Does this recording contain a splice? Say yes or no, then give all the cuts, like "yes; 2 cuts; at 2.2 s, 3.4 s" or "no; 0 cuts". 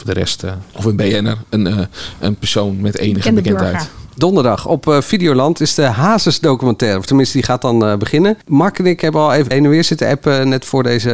yes; 1 cut; at 9.5 s